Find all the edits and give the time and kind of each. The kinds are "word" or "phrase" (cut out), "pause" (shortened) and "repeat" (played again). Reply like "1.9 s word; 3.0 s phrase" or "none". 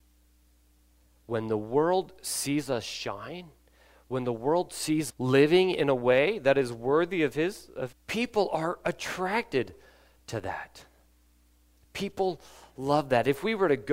5.1 s word; 7.9 s phrase